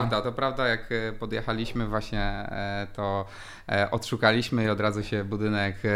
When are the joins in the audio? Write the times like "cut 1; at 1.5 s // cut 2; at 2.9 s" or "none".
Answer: none